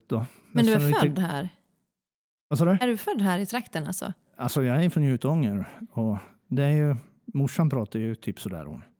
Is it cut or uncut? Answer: uncut